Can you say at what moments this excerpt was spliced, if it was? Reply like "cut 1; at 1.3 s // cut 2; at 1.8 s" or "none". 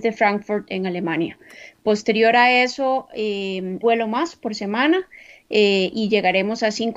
cut 1; at 3.8 s